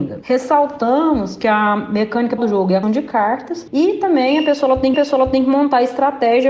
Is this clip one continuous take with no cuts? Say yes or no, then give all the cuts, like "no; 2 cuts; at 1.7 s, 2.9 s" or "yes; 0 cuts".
no; 3 cuts; at 2.4 s, 2.8 s, 4.9 s